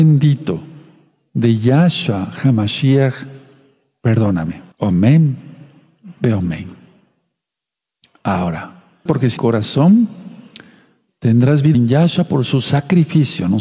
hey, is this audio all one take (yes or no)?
no